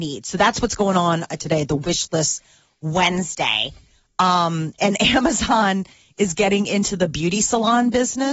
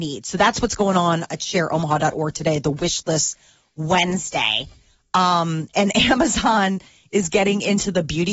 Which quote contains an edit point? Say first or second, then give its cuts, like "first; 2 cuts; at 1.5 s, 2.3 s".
first; 1 cut; at 1.4 s